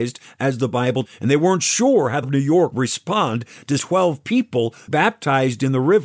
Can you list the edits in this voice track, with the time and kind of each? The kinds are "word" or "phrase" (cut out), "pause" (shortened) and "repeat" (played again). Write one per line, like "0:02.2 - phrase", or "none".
0:01.0 - word
0:02.2 - word
0:02.7 - word
0:03.8 - word
0:04.9 - word